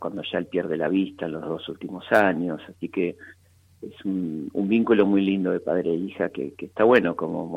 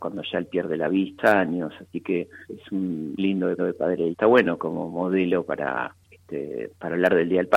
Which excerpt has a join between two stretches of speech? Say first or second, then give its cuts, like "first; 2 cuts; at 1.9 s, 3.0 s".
second; 6 cuts; at 1.2 s, 2.5 s, 3.2 s, 3.6 s, 4.1 s, 6.0 s